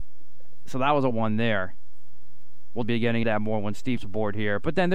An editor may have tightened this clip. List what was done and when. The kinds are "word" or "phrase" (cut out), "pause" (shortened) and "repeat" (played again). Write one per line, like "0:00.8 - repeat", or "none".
0:01.1 - word
0:02.8 - word
0:03.2 - word
0:04.0 - word